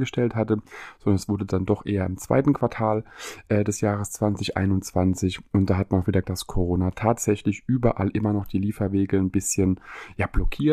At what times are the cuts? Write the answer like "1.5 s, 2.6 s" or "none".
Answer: 6.2 s